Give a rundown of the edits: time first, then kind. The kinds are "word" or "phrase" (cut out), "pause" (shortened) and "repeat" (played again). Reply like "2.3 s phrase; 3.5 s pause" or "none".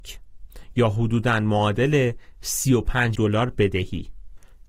3.1 s word

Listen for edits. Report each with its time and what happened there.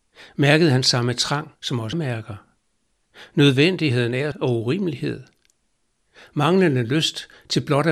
1.6 s pause; 1.9 s word; 4.3 s phrase

